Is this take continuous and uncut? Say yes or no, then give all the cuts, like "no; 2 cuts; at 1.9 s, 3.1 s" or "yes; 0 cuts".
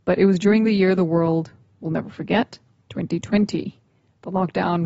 yes; 0 cuts